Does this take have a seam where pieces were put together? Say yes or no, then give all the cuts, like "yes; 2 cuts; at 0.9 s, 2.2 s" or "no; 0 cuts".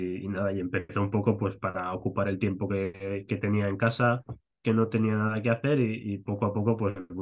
no; 0 cuts